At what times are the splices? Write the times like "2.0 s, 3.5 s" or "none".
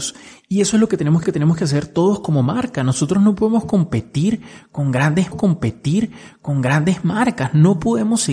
1.2 s, 5.3 s